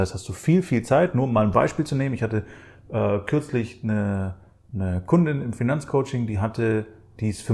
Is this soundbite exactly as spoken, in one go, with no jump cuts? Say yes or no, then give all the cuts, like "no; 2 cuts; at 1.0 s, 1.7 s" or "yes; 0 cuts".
yes; 0 cuts